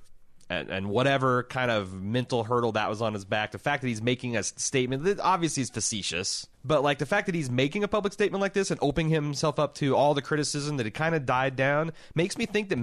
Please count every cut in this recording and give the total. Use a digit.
1